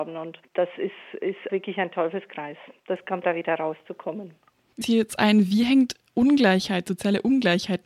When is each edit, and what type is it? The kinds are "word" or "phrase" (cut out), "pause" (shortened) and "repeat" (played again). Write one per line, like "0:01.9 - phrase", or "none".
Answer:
0:01.5 - word
0:03.2 - word
0:04.8 - word